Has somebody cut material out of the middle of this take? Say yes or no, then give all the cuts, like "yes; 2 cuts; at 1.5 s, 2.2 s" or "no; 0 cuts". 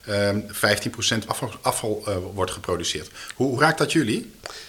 yes; 2 cuts; at 1.3 s, 3.6 s